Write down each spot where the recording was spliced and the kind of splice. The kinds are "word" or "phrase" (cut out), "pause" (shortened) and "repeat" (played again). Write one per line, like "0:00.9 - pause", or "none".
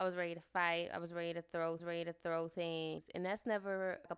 0:01.8 - repeat

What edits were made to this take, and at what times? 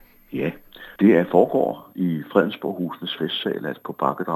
0:01.0 - pause

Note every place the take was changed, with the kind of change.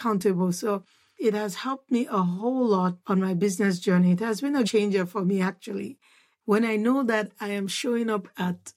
0:01.2 - word
0:03.0 - pause
0:04.6 - word

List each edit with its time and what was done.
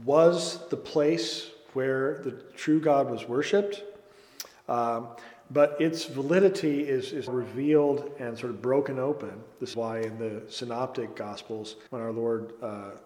0:07.3 - word
0:09.7 - word
0:11.9 - pause

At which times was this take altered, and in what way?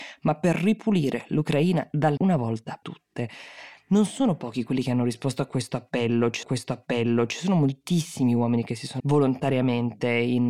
0:02.2 - word
0:02.8 - word
0:06.4 - repeat
0:09.0 - word

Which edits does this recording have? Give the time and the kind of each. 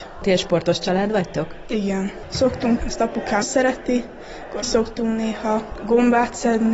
0:02.8 - word
0:03.4 - word
0:04.6 - word

